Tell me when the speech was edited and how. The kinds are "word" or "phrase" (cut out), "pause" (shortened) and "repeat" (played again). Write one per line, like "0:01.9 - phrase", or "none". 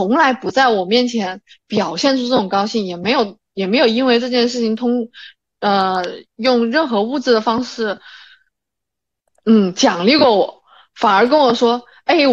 none